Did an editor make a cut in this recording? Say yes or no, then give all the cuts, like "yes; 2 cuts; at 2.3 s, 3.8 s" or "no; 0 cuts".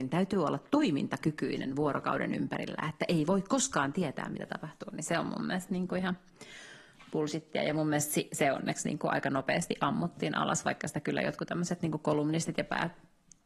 no; 0 cuts